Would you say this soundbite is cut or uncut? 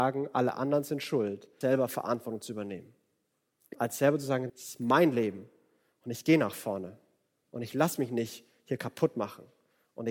cut